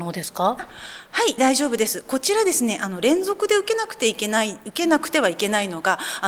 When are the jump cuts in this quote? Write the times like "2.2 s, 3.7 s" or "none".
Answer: 1.4 s